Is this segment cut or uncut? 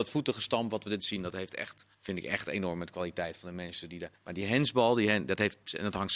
cut